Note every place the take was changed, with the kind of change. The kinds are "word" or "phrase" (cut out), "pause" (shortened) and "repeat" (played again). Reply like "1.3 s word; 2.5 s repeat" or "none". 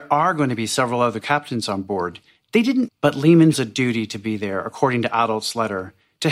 1.2 s word; 2.9 s phrase; 3.5 s word